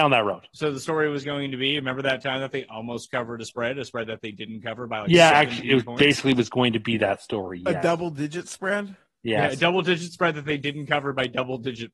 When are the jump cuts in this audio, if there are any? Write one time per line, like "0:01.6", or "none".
none